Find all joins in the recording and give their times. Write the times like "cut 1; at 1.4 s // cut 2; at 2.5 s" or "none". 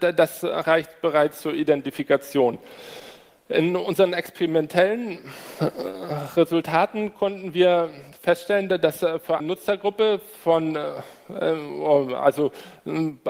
cut 1; at 9.4 s